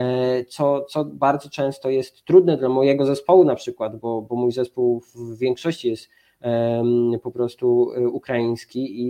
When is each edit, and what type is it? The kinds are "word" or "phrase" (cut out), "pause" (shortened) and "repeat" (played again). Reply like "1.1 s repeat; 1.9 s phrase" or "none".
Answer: none